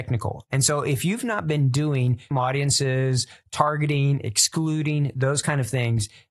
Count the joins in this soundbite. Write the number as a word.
one